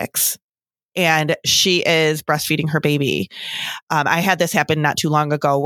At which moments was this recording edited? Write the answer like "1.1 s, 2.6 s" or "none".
none